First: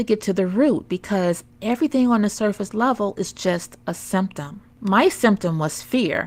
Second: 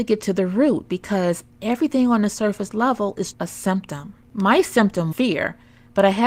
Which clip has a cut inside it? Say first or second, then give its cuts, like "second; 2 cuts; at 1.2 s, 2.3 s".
second; 2 cuts; at 3.3 s, 5.1 s